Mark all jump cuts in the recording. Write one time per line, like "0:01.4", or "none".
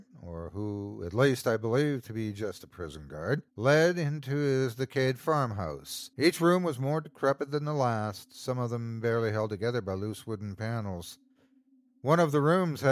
0:03.5
0:06.1